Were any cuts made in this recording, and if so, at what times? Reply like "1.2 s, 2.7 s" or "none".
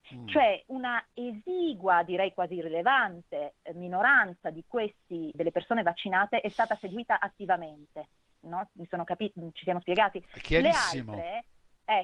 5.3 s